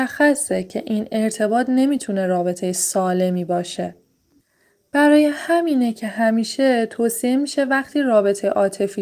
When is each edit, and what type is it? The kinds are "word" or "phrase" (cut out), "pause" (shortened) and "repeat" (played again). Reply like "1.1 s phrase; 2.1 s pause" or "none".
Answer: none